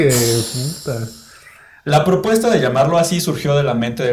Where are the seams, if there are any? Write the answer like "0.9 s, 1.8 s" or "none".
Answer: none